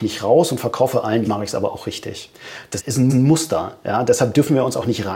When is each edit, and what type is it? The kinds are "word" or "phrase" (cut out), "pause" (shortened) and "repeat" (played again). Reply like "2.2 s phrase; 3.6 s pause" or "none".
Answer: 1.2 s word; 2.8 s word; 3.1 s repeat